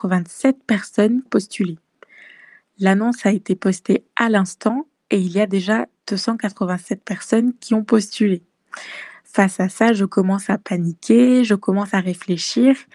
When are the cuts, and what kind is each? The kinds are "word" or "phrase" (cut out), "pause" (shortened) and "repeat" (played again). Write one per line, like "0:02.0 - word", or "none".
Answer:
0:01.3 - phrase